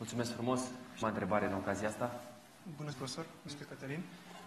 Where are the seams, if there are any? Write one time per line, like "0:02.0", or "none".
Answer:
0:01.0
0:02.9
0:03.5